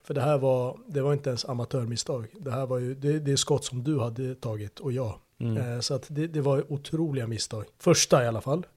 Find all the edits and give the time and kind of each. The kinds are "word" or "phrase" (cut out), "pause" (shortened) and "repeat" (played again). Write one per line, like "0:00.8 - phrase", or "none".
0:07.7 - pause